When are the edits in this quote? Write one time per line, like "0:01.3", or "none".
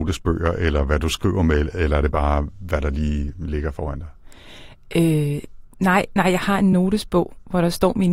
none